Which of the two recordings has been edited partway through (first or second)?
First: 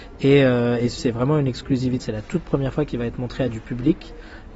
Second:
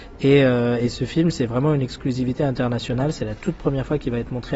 first